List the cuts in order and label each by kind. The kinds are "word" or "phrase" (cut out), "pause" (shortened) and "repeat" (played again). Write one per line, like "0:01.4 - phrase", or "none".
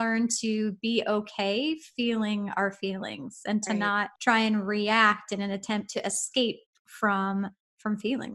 0:04.2 - pause